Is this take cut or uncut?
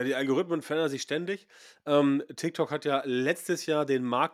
uncut